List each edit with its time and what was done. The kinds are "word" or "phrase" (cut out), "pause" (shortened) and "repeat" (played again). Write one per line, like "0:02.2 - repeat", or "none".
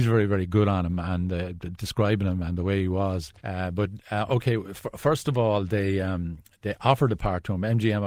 0:03.4 - pause